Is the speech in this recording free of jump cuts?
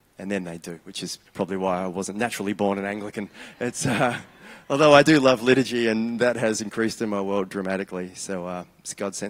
no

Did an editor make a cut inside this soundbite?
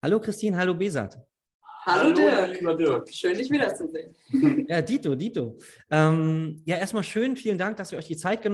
no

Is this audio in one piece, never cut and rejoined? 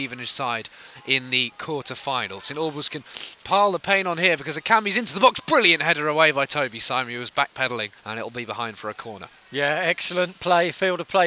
no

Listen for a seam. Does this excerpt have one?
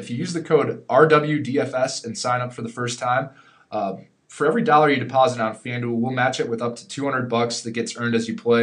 no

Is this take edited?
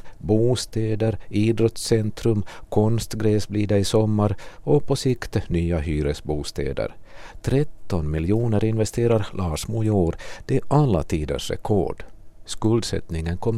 no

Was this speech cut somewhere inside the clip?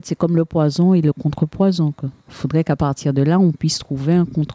yes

